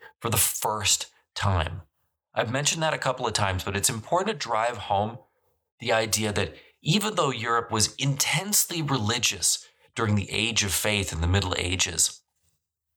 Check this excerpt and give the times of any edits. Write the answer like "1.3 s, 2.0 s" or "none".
none